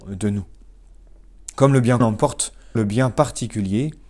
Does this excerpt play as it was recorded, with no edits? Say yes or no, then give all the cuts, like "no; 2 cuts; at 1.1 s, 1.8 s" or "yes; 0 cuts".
no; 2 cuts; at 2.0 s, 2.8 s